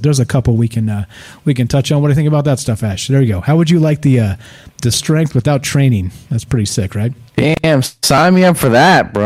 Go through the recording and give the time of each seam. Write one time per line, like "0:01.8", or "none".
0:04.9

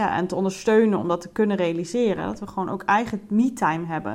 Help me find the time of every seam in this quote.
none

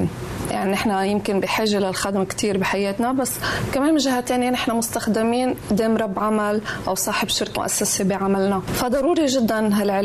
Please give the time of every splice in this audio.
0:07.6

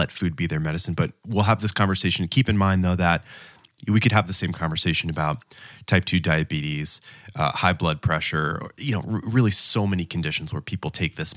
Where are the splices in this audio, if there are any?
none

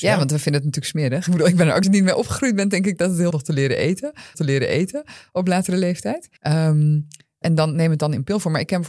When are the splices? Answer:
0:01.8
0:03.3
0:04.3
0:06.4
0:07.4

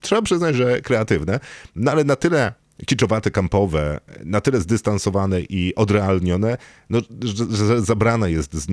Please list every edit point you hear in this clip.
none

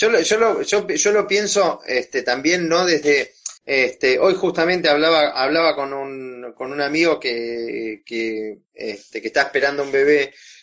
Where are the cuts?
0:03.6

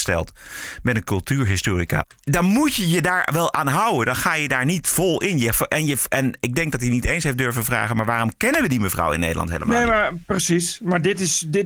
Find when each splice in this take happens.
none

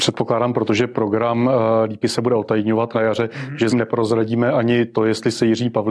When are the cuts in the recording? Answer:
0:02.0
0:02.9
0:03.7

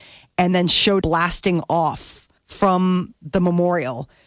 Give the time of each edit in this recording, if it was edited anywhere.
0:01.0
0:02.4

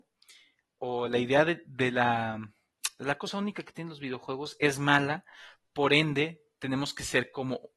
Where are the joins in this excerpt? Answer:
none

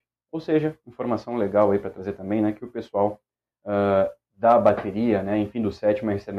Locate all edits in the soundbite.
none

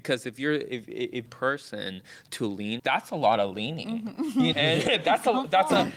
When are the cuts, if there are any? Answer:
0:01.3
0:02.8
0:04.5

